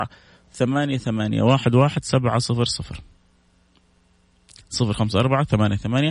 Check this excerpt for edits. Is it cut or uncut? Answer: uncut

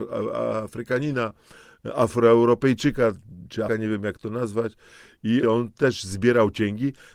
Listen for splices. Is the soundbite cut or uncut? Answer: cut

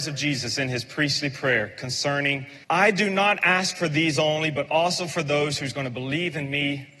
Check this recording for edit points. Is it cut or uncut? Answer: cut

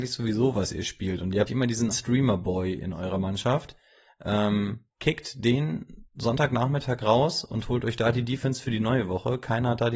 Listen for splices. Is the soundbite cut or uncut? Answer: cut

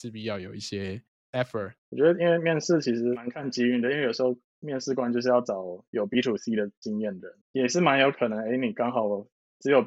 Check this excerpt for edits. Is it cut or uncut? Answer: cut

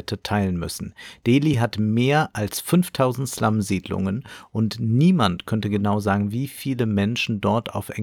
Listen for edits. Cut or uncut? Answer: uncut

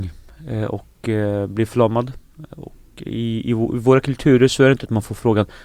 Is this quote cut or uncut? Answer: uncut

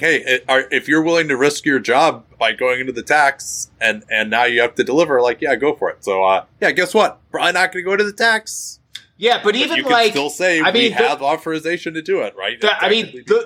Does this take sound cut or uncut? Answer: cut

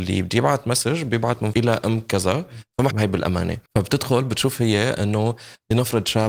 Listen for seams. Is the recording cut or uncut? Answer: cut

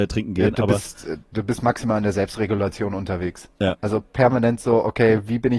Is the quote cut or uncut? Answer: uncut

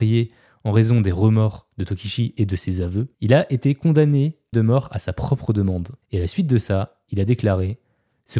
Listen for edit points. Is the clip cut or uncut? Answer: cut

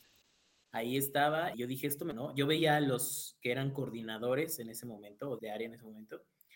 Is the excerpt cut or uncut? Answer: cut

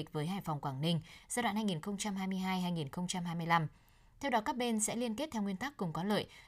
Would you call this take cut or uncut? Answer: uncut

